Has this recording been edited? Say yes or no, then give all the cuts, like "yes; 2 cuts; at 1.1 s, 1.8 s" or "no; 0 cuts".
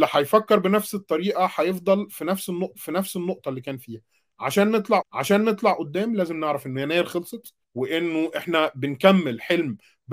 yes; 3 cuts; at 2.7 s, 5.0 s, 7.6 s